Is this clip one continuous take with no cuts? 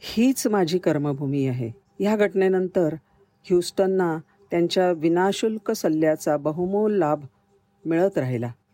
yes; 0 cuts

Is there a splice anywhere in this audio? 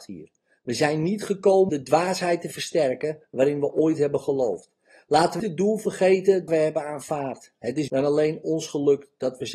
yes; 4 cuts; at 1.7 s, 5.4 s, 6.5 s, 7.9 s

